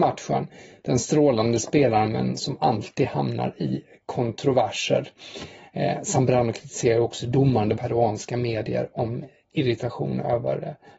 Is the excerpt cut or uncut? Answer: cut